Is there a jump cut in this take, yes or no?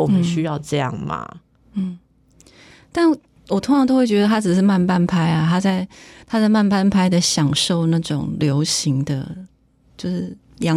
no